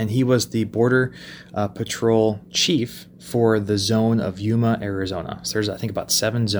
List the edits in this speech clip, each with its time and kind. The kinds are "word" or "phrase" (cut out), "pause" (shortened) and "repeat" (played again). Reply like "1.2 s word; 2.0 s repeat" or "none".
3.1 s pause